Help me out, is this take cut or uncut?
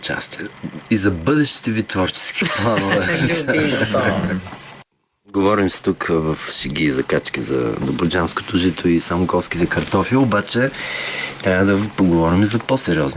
uncut